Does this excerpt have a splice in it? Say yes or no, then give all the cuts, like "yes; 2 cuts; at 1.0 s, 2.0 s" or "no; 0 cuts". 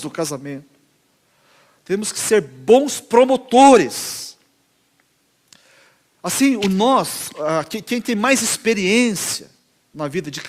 no; 0 cuts